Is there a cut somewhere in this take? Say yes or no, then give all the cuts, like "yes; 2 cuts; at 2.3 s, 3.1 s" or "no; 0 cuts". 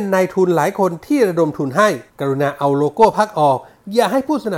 yes; 1 cut; at 2.1 s